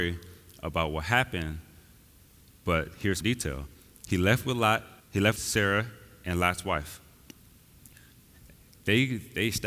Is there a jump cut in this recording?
yes; 3 cuts; at 3.2 s, 5.0 s, 5.4 s

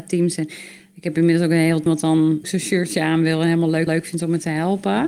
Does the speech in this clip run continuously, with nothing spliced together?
no; 3 cuts; at 1.9 s, 2.4 s, 3.9 s

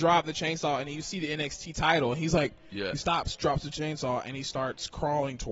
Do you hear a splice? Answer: no; 0 cuts

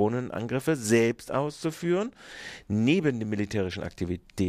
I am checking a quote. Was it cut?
no; 0 cuts

